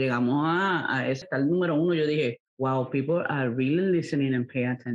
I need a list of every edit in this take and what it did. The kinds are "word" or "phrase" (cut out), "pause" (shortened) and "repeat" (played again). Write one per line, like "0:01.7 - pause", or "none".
0:01.2 - word
0:02.5 - pause